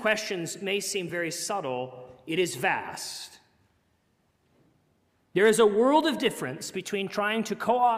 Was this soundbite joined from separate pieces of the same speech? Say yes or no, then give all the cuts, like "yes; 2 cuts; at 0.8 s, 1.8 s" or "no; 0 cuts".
no; 0 cuts